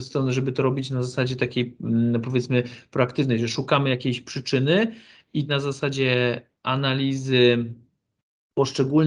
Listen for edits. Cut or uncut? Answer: cut